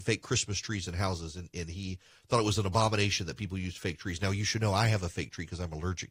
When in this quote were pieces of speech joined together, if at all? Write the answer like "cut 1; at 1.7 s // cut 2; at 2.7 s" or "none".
none